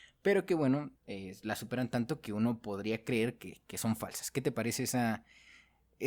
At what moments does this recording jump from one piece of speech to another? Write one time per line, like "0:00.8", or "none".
0:01.0

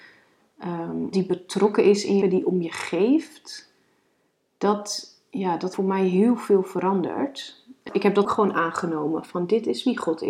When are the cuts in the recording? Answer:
0:01.1
0:02.2
0:05.7
0:07.9
0:08.2

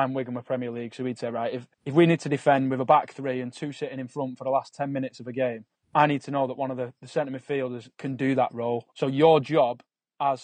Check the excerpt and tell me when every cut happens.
0:01.7
0:05.7
0:07.9
0:08.9

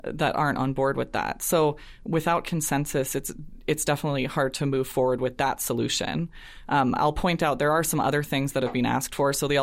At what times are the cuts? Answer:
none

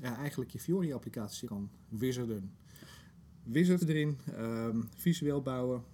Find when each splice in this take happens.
0:01.4
0:03.8

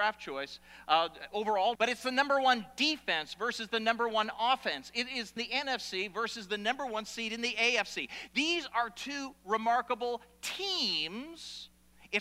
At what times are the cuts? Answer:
0:01.8
0:05.4

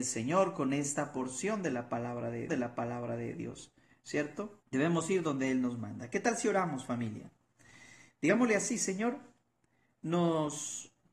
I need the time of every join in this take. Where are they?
0:02.5
0:04.6

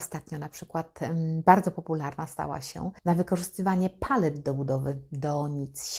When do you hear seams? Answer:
0:03.0

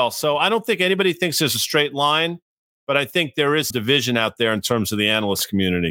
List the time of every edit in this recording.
0:03.7

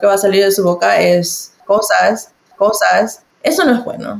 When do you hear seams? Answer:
0:02.5

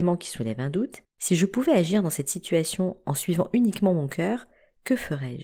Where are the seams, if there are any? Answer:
0:01.1

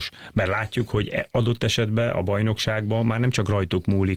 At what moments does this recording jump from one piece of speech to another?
none

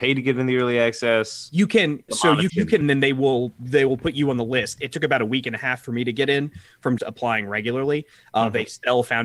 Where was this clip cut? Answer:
0:02.1
0:02.5
0:02.8
0:07.0

